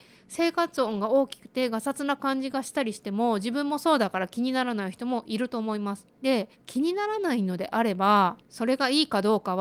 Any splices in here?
yes; 2 cuts; at 6.5 s, 8.4 s

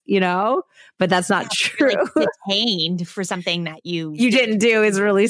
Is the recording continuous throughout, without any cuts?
yes; 0 cuts

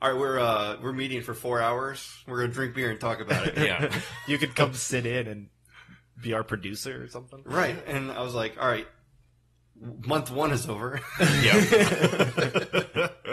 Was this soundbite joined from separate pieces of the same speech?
no; 0 cuts

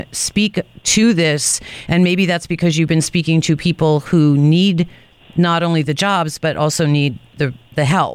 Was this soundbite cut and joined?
no; 0 cuts

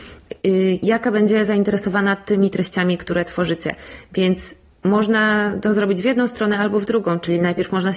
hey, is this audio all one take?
yes; 0 cuts

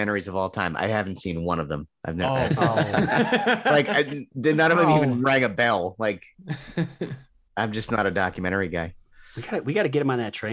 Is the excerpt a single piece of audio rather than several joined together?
yes; 0 cuts

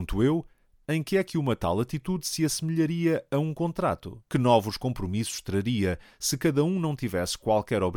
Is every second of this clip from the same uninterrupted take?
no; 1 cut; at 4.3 s

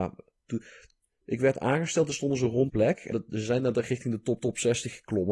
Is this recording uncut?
no; 3 cuts; at 2.7 s, 3.1 s, 4.4 s

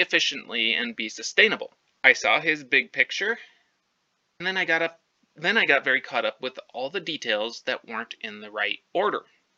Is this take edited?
yes; 3 cuts; at 1.8 s, 4.4 s, 5.1 s

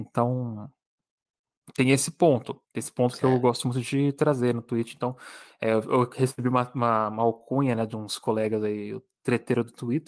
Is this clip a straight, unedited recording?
no; 1 cut; at 2.6 s

